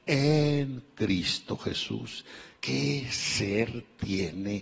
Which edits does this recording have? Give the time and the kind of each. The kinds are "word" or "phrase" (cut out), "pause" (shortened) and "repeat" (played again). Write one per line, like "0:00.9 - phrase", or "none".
0:02.6 - pause